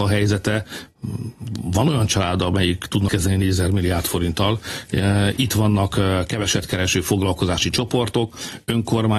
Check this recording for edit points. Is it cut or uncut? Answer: cut